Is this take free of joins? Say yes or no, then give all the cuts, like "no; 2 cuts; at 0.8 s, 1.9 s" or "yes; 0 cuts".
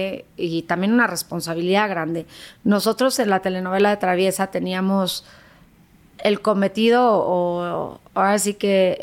yes; 0 cuts